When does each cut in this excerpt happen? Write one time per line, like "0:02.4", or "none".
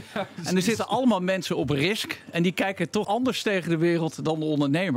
0:03.0